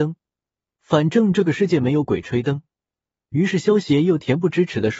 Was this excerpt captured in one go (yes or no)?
yes